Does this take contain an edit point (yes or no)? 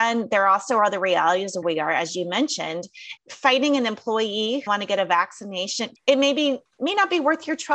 yes